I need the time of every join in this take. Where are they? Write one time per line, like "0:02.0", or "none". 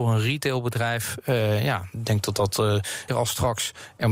0:01.9
0:03.1